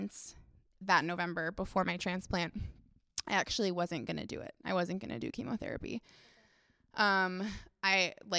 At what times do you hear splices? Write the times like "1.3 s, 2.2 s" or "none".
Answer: none

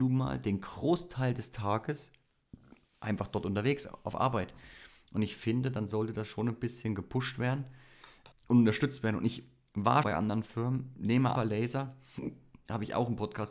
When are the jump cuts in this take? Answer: 8.3 s, 10.0 s, 11.4 s

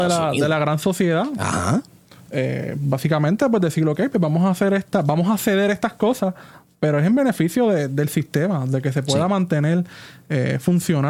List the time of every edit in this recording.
none

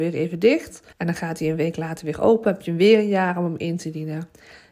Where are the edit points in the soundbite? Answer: 0.9 s

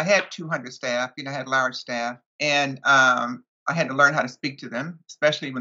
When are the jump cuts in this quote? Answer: 2.3 s

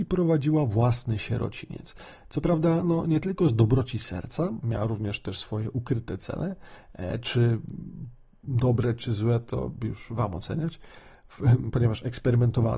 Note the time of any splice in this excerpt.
none

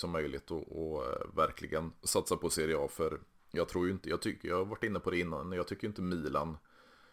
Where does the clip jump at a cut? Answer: none

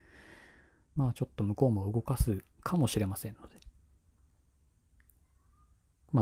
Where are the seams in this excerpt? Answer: 1.0 s, 2.5 s

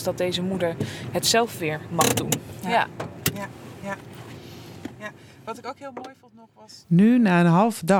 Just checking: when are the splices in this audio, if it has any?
none

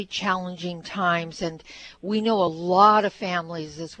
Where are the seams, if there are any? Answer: none

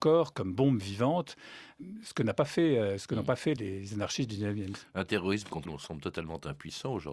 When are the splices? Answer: 3.6 s, 5.7 s

